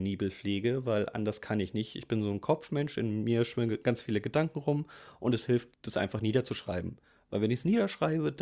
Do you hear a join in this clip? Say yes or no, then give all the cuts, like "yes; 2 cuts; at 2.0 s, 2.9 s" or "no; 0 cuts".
yes; 1 cut; at 5.7 s